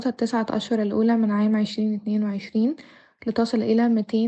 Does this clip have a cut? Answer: no; 0 cuts

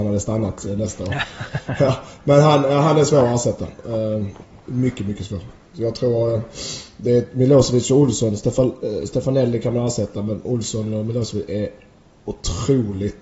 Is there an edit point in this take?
yes; 1 cut; at 4.6 s

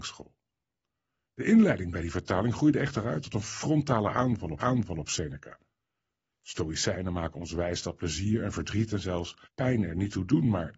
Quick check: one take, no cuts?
no; 2 cuts; at 4.6 s, 9.4 s

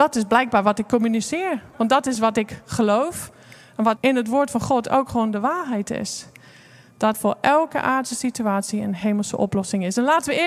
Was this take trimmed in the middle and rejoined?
yes; 2 cuts; at 4.0 s, 7.1 s

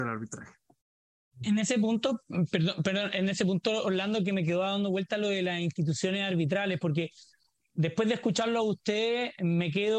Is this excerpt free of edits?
yes; 0 cuts

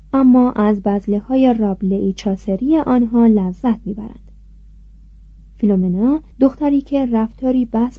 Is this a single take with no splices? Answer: no; 1 cut; at 6.3 s

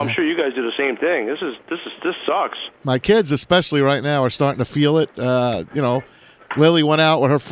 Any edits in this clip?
no; 0 cuts

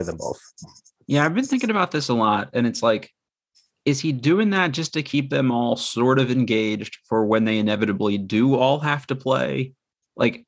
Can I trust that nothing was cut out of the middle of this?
yes; 0 cuts

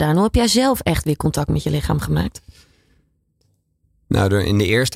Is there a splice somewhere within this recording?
no; 0 cuts

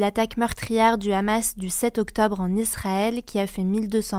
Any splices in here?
no; 0 cuts

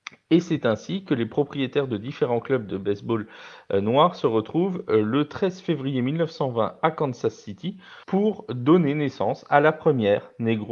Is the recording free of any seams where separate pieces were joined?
no; 1 cut; at 8.0 s

